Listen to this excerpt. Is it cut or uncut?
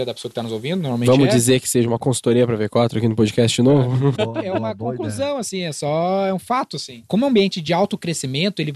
cut